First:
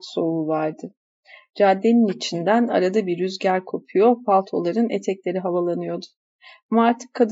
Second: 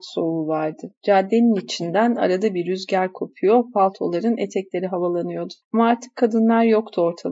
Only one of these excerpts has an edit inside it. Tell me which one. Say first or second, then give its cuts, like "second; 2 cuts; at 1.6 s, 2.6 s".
second; 2 cuts; at 1.0 s, 5.6 s